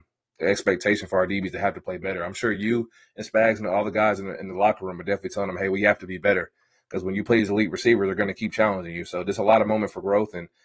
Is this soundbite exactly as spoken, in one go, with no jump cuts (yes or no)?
yes